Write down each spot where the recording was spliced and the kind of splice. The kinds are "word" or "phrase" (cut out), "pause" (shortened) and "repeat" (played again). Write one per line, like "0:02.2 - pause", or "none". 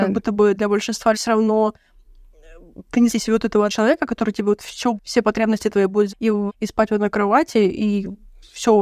0:01.1 - word
0:03.1 - phrase
0:03.7 - word
0:05.0 - word
0:06.1 - word
0:06.5 - phrase